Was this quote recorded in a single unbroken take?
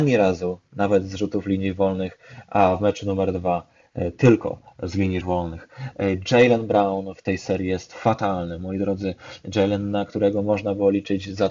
no; 1 cut; at 5.2 s

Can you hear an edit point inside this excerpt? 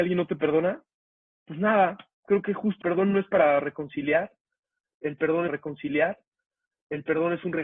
yes; 2 cuts; at 2.8 s, 5.5 s

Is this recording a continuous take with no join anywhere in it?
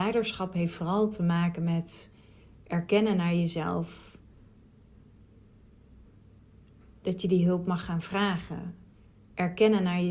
yes; 0 cuts

